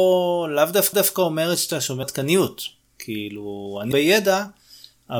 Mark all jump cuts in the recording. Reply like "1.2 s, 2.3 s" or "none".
0.9 s, 2.0 s, 3.9 s